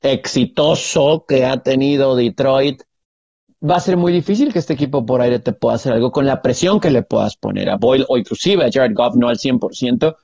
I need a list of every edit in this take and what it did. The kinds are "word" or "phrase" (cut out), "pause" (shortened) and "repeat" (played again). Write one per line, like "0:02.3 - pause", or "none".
none